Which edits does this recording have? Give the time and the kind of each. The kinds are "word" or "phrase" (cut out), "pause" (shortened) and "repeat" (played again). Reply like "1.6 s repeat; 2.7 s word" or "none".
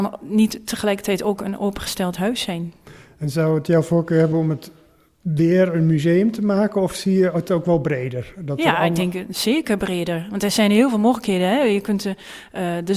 none

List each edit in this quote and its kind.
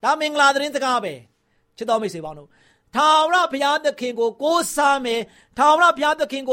none

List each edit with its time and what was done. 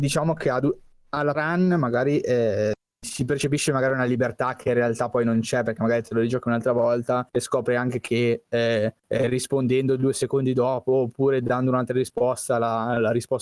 1.3 s word; 3.0 s word; 7.3 s pause; 9.0 s pause

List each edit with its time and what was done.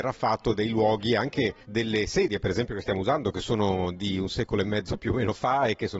1.6 s pause

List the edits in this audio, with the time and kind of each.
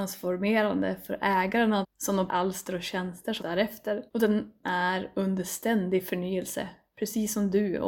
1.8 s phrase; 2.3 s word; 3.4 s word; 4.1 s pause; 4.6 s word

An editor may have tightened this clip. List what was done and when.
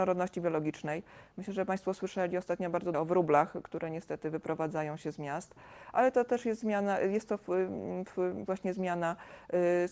2.9 s phrase; 8.5 s phrase

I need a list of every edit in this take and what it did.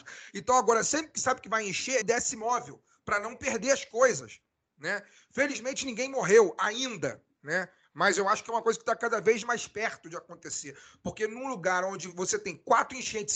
2.0 s phrase

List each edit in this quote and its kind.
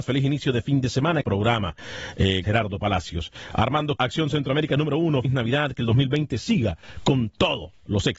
1.2 s word; 2.4 s word; 4.0 s word; 5.2 s word

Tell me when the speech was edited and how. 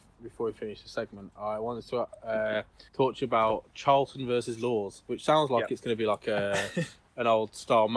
2.9 s pause

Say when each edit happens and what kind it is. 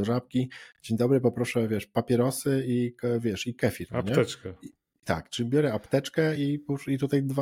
none

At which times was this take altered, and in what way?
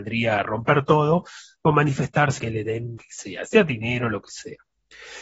2.4 s word; 3.0 s word

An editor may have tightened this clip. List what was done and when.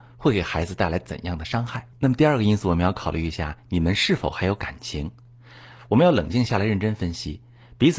1.9 s pause

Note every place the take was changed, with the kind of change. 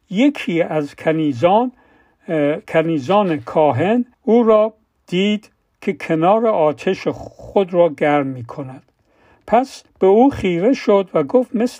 4.1 s pause; 4.9 s pause; 9.9 s pause

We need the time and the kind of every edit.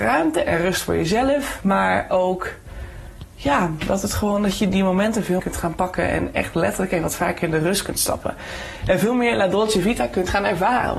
4.7 s word; 5.4 s word

